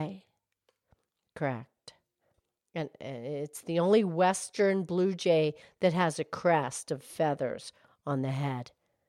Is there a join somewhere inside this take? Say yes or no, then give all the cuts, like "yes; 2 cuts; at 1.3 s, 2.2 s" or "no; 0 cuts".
no; 0 cuts